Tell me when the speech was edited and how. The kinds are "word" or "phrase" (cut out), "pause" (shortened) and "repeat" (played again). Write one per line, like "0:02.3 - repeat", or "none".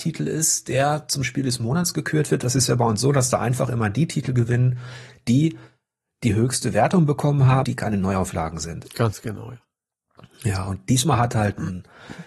0:07.6 - word